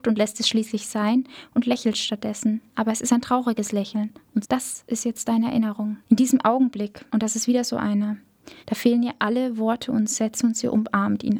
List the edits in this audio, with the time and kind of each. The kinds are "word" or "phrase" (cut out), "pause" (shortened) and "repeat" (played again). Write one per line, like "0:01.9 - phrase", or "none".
0:04.4 - word
0:06.0 - pause
0:07.1 - pause
0:08.6 - pause